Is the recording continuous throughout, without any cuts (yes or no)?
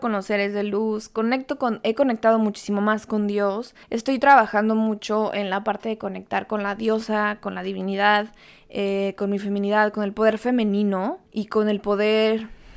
no